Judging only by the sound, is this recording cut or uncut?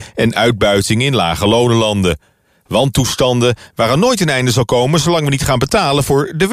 uncut